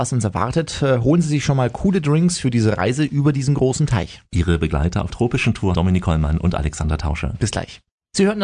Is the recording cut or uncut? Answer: cut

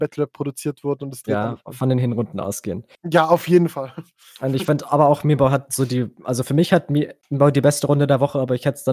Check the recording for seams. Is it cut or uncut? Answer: uncut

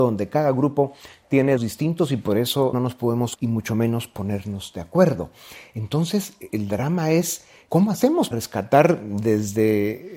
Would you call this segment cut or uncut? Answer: cut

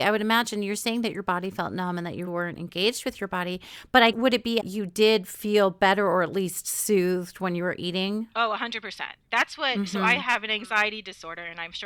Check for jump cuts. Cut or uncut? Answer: cut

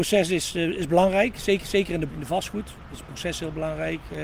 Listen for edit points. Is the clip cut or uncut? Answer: cut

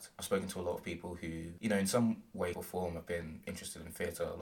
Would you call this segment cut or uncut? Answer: cut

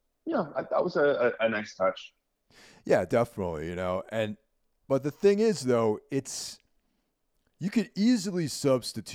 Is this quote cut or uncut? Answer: uncut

